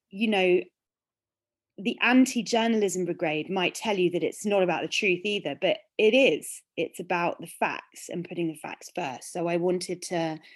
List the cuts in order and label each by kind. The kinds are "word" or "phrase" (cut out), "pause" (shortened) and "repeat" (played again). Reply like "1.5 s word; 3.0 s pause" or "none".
none